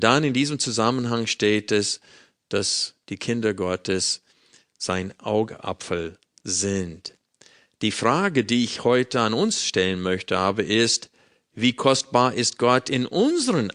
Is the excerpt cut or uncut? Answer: uncut